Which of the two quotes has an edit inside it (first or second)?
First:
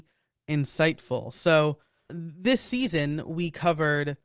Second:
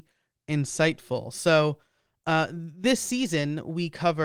first